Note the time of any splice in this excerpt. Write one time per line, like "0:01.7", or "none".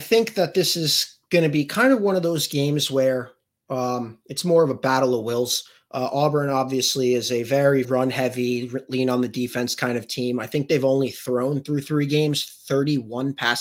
0:07.8